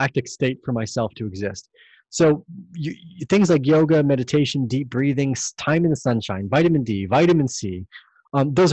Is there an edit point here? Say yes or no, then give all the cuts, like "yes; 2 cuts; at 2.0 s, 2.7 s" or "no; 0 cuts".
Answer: no; 0 cuts